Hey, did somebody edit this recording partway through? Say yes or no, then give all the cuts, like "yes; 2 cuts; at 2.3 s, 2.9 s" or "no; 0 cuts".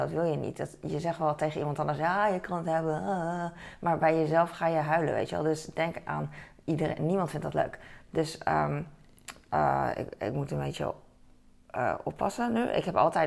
no; 0 cuts